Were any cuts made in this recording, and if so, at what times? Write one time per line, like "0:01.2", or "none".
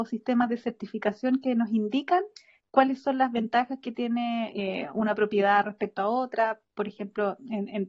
none